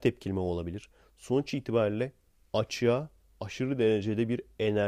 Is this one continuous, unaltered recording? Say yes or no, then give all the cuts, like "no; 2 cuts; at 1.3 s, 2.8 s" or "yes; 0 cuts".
yes; 0 cuts